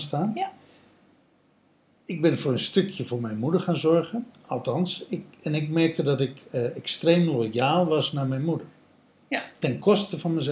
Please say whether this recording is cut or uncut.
uncut